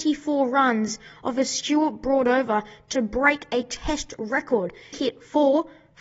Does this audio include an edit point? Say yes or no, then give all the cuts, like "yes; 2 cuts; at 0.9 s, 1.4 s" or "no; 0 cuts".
yes; 1 cut; at 4.9 s